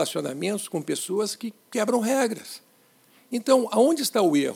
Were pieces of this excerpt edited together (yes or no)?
no